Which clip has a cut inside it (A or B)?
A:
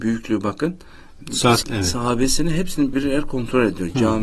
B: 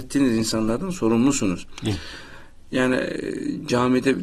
A